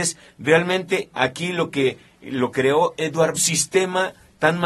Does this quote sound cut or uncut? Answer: cut